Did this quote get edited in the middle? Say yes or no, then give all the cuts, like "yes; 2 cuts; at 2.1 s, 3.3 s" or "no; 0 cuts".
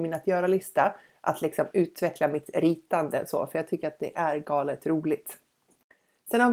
no; 0 cuts